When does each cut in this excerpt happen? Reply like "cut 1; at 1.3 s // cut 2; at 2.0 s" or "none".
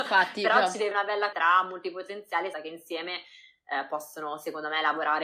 cut 1; at 0.9 s // cut 2; at 1.3 s // cut 3; at 2.5 s